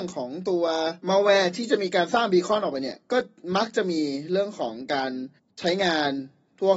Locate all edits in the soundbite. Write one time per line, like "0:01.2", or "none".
0:01.0
0:05.4